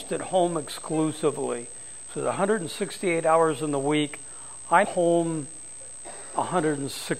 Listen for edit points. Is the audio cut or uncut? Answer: cut